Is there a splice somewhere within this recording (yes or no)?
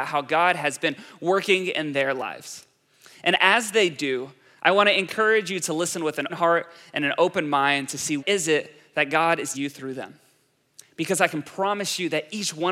yes